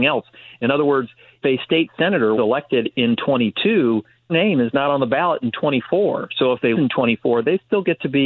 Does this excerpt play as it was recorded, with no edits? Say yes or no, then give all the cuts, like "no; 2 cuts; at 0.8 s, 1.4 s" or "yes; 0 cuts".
no; 4 cuts; at 1.4 s, 2.3 s, 4.3 s, 6.7 s